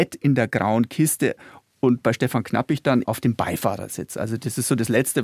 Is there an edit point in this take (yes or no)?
yes